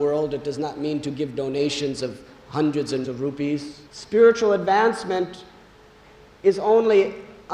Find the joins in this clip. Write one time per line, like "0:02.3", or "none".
0:03.0
0:03.9

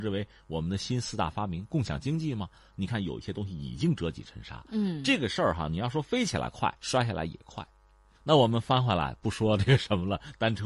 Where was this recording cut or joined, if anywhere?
0:06.8

